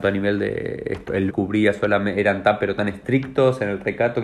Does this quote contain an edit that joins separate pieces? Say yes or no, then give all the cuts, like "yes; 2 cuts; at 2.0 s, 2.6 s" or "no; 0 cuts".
yes; 1 cut; at 1.3 s